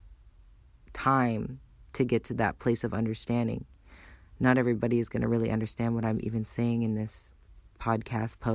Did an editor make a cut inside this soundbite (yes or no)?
no